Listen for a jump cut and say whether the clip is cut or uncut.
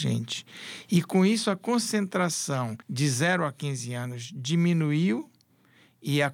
cut